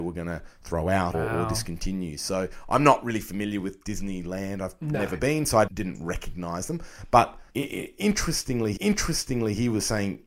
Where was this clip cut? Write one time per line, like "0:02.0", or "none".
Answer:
0:01.1
0:05.7
0:07.5
0:08.8